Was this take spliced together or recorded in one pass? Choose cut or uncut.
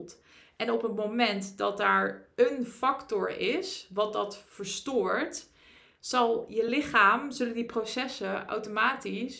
uncut